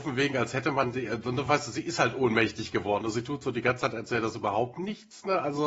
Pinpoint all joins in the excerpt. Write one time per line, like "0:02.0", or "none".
none